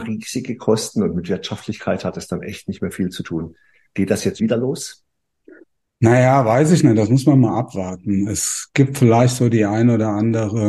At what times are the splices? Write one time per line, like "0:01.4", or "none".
0:04.4